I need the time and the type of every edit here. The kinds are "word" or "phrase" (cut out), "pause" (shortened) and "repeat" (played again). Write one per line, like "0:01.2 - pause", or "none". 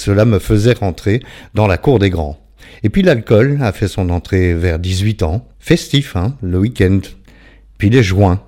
0:05.5 - pause